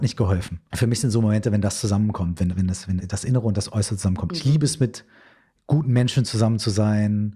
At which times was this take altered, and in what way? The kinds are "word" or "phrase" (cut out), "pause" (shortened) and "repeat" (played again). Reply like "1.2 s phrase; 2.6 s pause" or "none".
2.5 s word; 3.0 s word